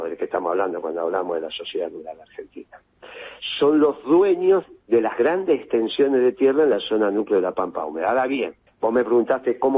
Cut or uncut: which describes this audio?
cut